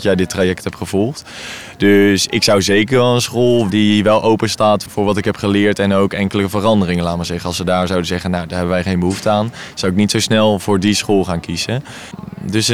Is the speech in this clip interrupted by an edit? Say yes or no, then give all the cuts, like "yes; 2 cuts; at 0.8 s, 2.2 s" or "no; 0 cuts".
yes; 2 cuts; at 3.7 s, 4.9 s